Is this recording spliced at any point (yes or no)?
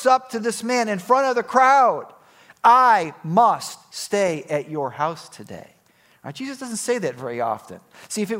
no